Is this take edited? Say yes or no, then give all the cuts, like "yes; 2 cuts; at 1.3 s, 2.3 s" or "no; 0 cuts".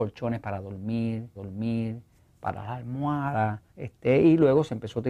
yes; 2 cuts; at 1.4 s, 3.7 s